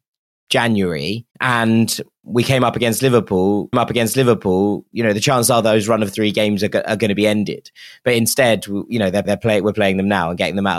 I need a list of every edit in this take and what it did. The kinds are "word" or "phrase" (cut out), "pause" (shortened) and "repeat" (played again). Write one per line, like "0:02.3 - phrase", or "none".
0:01.3 - pause
0:03.7 - repeat
0:09.2 - repeat